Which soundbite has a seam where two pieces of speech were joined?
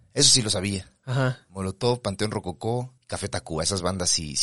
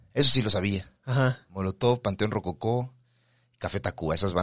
first; 1 cut; at 3.0 s

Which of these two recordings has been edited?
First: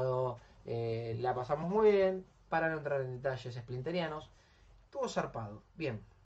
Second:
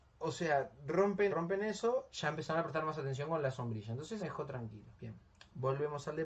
second; 3 cuts; at 1.3 s, 4.2 s, 4.9 s

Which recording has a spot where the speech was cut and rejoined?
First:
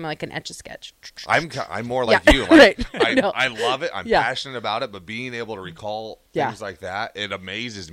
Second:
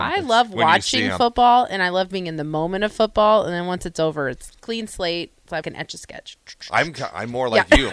second; 2 cuts; at 4.5 s, 5.6 s

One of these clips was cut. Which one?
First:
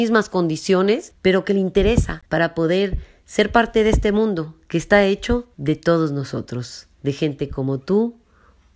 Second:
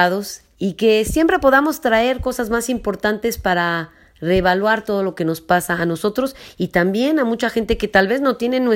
first; 3 cuts; at 2.3 s, 5.5 s, 6.9 s

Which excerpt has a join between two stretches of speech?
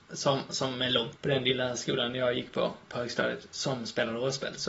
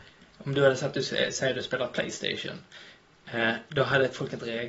first; 1 cut; at 1.2 s

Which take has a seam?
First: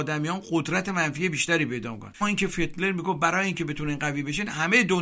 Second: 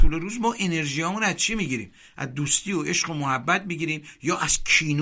first; 1 cut; at 2.2 s

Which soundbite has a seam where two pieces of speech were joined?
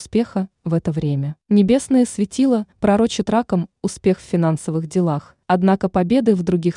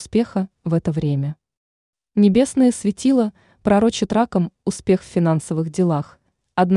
first; 3 cuts; at 1.4 s, 2.7 s, 5.4 s

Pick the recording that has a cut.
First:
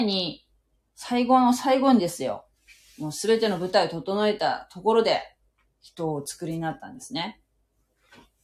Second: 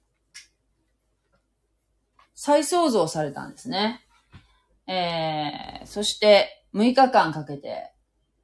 second; 1 cut; at 6.7 s

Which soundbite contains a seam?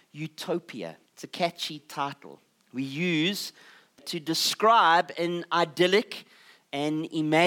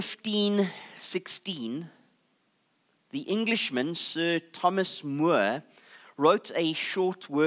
first; 3 cuts; at 1.1 s, 2.6 s, 4.0 s

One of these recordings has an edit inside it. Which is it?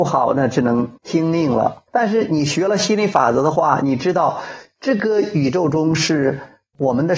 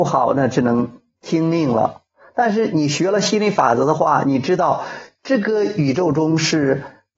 first; 2 cuts; at 1.0 s, 1.9 s

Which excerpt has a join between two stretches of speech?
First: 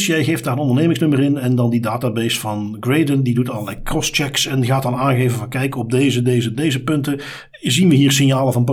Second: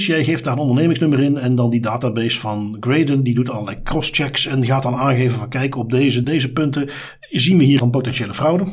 second; 2 cuts; at 6.2 s, 7.8 s

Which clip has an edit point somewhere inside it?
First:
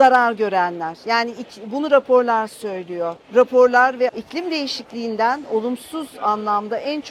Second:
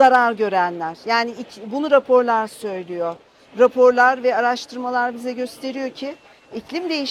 first; 2 cuts; at 3.2 s, 4.1 s

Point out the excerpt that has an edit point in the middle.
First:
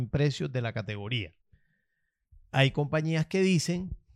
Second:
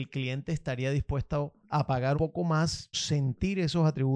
second; 3 cuts; at 1.6 s, 2.1 s, 2.9 s

